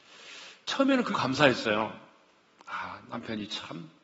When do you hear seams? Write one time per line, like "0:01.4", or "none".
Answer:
0:01.1